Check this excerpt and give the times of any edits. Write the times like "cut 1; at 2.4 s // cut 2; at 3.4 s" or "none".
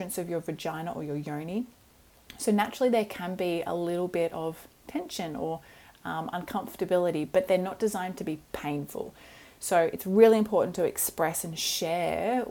none